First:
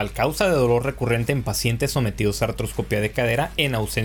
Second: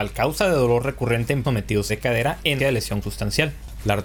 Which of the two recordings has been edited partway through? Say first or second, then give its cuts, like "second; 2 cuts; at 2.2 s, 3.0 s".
second; 4 cuts; at 1.4 s, 1.9 s, 2.6 s, 3.0 s